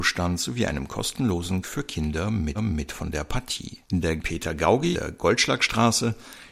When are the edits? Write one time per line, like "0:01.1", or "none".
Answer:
0:01.6
0:02.5
0:03.8
0:04.2
0:04.9